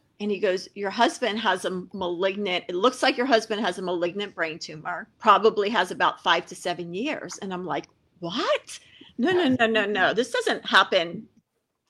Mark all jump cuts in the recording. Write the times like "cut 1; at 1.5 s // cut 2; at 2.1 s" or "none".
cut 1; at 5.1 s